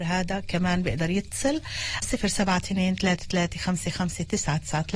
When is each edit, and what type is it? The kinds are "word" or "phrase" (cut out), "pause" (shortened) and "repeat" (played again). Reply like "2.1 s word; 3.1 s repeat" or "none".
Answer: 2.0 s word